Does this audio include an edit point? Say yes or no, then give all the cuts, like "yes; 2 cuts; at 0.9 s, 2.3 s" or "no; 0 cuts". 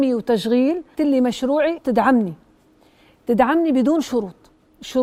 yes; 2 cuts; at 0.9 s, 1.8 s